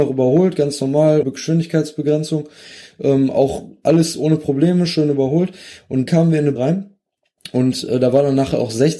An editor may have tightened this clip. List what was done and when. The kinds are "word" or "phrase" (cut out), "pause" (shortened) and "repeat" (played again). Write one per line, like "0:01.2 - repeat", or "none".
0:01.2 - word
0:06.1 - word
0:06.6 - word